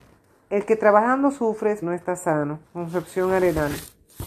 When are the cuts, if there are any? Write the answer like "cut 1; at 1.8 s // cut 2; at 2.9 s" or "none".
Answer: cut 1; at 1.8 s // cut 2; at 2.6 s